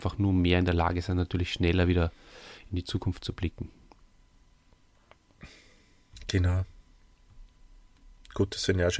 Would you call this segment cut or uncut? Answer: uncut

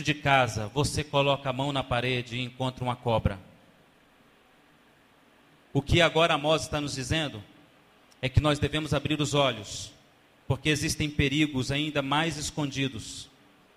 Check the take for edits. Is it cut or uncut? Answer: uncut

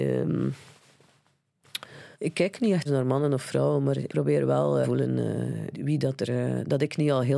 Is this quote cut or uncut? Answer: cut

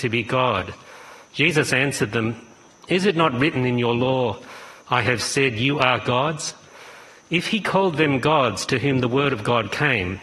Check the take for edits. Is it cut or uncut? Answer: uncut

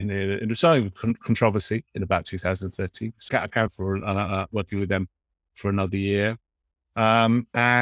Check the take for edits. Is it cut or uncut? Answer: cut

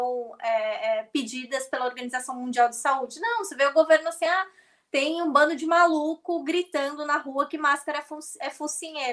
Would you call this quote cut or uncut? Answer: uncut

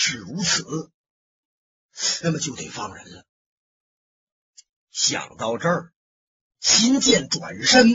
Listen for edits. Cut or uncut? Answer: uncut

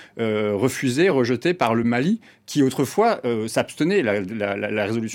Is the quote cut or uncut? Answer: uncut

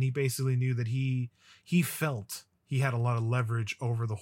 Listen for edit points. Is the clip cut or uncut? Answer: uncut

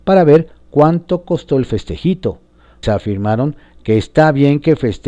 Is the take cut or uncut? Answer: cut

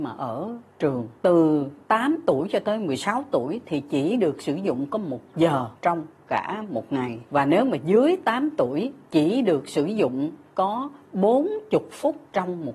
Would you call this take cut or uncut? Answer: cut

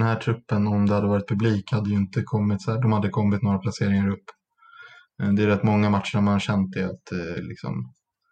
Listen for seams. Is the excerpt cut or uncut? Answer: uncut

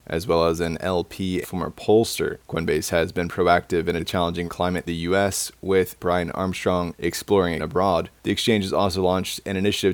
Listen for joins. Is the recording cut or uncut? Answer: cut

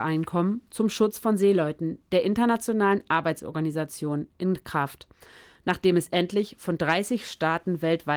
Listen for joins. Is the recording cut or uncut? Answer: uncut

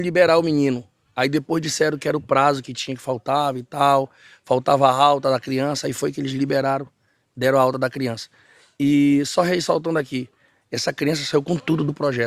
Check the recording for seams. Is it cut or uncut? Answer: uncut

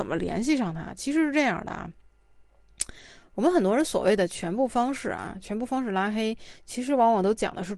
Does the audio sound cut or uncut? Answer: uncut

